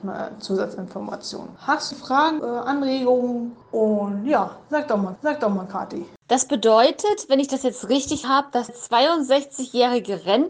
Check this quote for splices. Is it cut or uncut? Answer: cut